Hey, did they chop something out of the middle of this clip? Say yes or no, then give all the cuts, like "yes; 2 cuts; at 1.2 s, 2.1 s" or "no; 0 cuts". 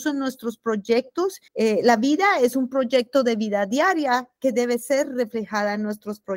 yes; 1 cut; at 1.5 s